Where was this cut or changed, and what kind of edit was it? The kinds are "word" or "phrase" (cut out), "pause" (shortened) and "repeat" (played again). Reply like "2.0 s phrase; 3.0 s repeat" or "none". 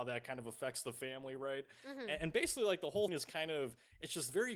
3.1 s word